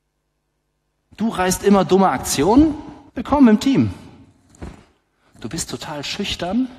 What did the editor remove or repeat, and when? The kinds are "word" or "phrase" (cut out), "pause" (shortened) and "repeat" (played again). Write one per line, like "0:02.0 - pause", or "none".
0:03.1 - pause